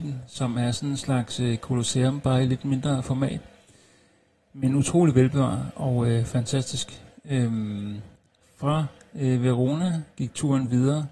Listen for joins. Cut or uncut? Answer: uncut